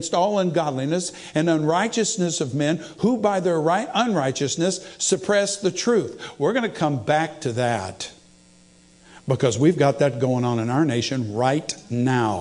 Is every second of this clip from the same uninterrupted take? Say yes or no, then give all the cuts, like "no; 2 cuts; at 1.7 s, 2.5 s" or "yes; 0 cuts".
yes; 0 cuts